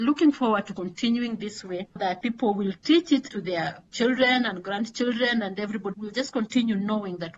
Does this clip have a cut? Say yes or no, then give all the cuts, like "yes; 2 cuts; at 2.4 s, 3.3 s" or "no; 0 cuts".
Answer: yes; 3 cuts; at 2.0 s, 3.3 s, 5.9 s